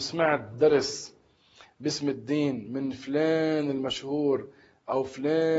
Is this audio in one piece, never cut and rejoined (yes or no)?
yes